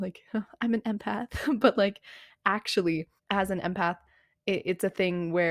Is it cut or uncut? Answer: cut